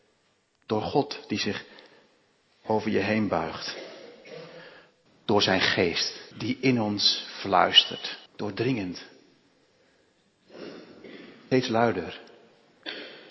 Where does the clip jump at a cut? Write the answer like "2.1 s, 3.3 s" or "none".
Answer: 5.1 s, 6.3 s, 8.3 s